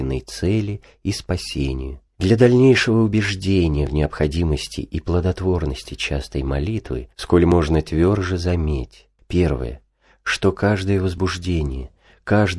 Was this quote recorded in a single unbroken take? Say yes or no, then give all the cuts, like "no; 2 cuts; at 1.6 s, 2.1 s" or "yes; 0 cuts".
no; 3 cuts; at 2.1 s, 7.1 s, 9.2 s